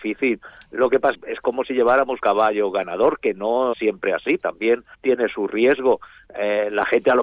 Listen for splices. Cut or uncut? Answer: cut